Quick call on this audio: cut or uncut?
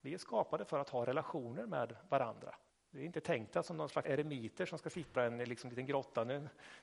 cut